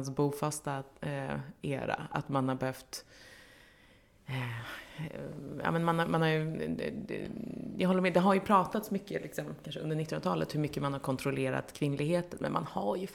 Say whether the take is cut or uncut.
uncut